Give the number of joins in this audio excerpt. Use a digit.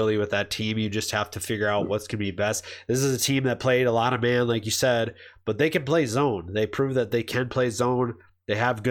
0